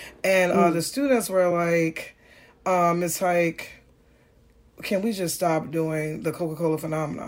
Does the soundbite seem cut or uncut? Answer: uncut